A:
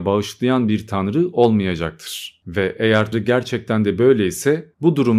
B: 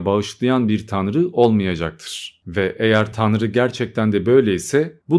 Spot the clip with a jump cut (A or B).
A